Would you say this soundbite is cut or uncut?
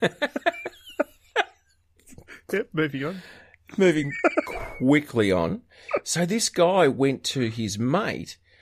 uncut